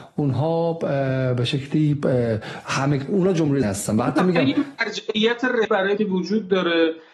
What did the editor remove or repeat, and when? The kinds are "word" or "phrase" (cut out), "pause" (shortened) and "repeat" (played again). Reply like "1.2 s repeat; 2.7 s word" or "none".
3.6 s word; 5.6 s word; 6.0 s word